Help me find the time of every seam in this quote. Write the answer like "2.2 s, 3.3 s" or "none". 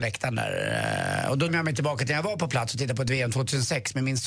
1.5 s